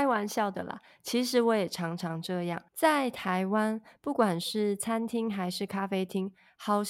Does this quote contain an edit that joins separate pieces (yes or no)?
yes